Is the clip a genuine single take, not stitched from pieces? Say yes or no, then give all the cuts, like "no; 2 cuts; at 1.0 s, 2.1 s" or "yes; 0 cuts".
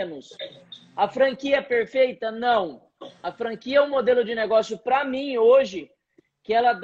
yes; 0 cuts